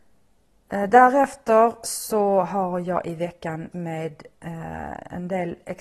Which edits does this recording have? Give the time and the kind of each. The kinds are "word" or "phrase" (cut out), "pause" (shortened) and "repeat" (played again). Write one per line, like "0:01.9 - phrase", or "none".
0:03.7 - word